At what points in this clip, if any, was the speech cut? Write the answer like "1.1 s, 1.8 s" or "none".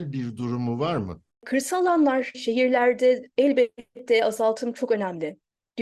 2.3 s